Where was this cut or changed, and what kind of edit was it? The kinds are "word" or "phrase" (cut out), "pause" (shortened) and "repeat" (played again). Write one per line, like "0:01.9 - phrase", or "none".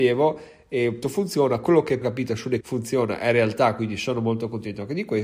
0:01.0 - word
0:02.0 - phrase
0:02.6 - phrase